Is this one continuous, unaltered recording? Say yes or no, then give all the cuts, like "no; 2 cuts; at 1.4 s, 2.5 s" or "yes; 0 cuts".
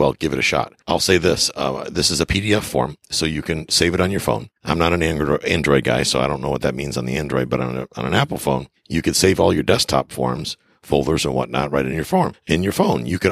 yes; 0 cuts